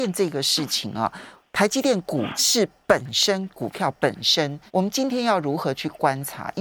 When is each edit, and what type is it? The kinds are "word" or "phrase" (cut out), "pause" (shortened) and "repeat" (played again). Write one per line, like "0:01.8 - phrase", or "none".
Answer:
0:04.7 - pause